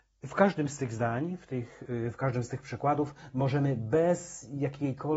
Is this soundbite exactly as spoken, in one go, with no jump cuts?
yes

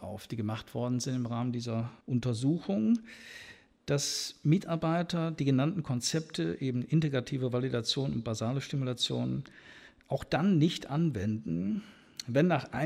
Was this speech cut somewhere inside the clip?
yes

